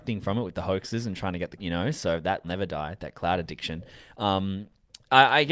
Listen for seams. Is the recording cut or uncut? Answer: cut